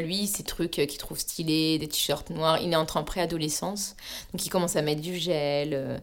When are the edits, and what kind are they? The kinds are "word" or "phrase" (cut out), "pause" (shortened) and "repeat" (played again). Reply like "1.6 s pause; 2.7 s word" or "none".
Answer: none